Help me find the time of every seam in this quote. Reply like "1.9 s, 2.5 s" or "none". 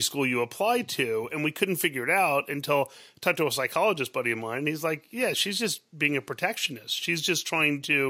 none